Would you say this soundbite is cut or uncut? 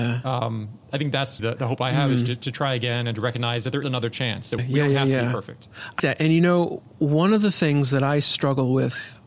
cut